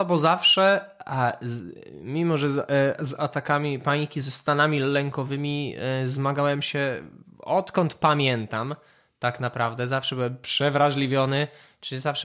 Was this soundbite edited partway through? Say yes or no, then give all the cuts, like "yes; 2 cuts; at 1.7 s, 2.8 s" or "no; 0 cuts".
no; 0 cuts